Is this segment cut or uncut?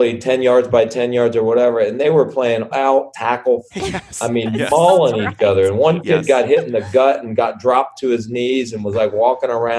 cut